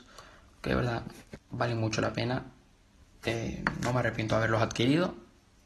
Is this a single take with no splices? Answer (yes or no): yes